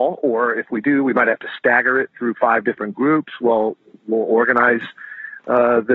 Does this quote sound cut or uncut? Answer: uncut